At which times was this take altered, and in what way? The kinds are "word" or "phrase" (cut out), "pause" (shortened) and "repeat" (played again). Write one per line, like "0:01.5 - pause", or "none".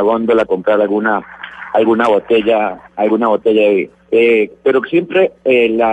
0:02.8 - pause
0:04.0 - pause